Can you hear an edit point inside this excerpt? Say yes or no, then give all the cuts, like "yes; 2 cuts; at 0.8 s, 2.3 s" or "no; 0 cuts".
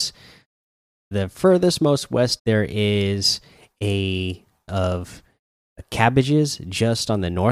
yes; 3 cuts; at 1.1 s, 2.4 s, 4.7 s